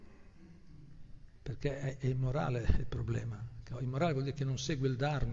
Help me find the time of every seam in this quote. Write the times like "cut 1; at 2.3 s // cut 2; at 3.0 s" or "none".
none